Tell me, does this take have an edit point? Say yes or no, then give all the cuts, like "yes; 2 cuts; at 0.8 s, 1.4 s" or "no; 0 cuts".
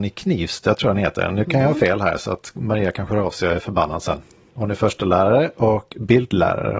no; 0 cuts